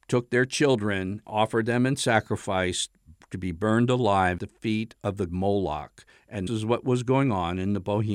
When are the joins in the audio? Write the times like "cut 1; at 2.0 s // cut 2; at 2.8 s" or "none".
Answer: cut 1; at 1.2 s // cut 2; at 4.4 s // cut 3; at 5.3 s // cut 4; at 6.5 s

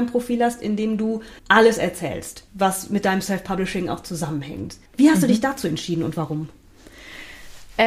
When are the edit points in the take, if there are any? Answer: cut 1; at 1.4 s // cut 2; at 2.5 s // cut 3; at 4.9 s

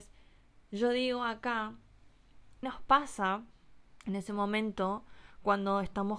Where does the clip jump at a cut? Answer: cut 1; at 2.6 s // cut 2; at 4.0 s

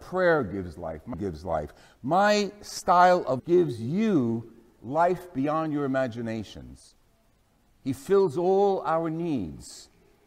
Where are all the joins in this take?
cut 1; at 1.1 s // cut 2; at 3.4 s

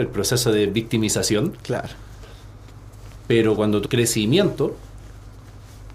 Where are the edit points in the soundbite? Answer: cut 1; at 3.8 s

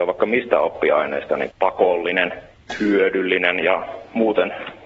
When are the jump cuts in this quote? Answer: cut 1; at 1.5 s

